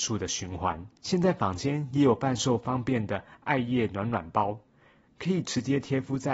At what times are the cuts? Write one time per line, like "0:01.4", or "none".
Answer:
0:01.0